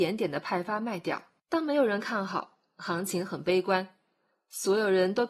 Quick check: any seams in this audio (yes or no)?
yes